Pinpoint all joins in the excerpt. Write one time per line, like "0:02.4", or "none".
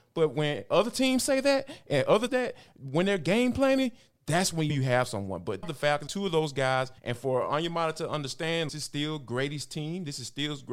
0:02.3
0:04.7
0:05.6
0:06.1
0:07.0
0:08.7